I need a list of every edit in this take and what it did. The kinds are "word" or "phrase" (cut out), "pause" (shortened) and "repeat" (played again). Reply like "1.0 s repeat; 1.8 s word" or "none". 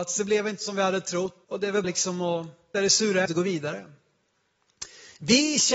1.4 s word; 1.8 s word; 2.7 s word; 3.3 s word